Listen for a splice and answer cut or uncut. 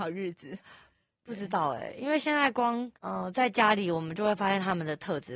cut